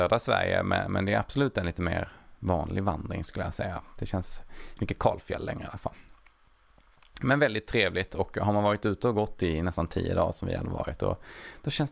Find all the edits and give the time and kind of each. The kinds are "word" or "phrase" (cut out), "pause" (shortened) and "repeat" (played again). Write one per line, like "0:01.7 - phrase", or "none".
0:04.8 - word